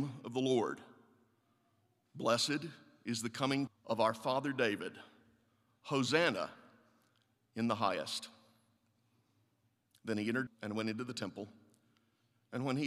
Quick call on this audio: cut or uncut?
cut